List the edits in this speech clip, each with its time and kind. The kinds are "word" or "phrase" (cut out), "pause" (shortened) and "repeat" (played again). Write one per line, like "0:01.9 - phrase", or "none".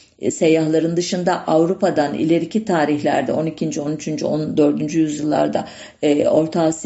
none